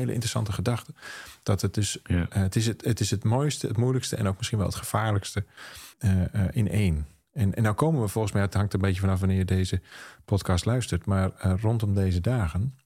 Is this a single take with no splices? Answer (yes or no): no